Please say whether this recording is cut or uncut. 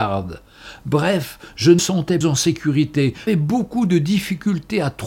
cut